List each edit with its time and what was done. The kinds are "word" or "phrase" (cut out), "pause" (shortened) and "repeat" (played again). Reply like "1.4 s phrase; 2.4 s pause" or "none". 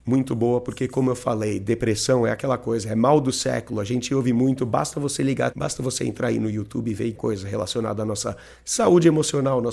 5.5 s word; 7.1 s word